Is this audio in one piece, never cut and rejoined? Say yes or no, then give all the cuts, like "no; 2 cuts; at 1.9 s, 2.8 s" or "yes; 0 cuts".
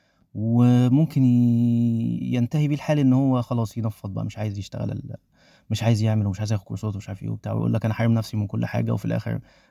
yes; 0 cuts